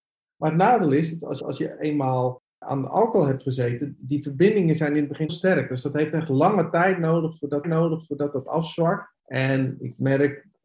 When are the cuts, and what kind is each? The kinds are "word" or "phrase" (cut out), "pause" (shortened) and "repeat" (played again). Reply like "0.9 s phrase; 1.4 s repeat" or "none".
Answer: 1.4 s repeat; 2.5 s pause; 5.3 s phrase; 7.6 s repeat; 9.2 s pause

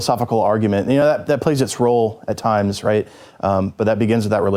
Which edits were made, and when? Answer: none

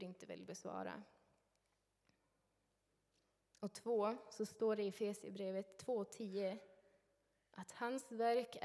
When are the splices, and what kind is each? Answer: none

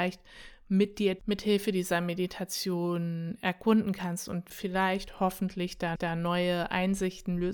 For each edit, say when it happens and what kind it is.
1.2 s word; 4.5 s word; 6.0 s repeat

